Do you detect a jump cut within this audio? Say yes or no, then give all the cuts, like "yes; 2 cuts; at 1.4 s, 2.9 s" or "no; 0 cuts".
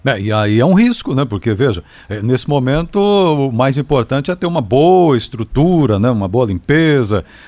no; 0 cuts